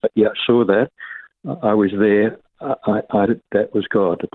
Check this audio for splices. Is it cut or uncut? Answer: cut